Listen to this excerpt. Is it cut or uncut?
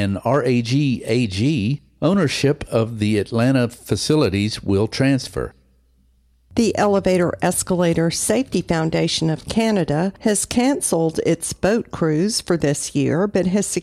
uncut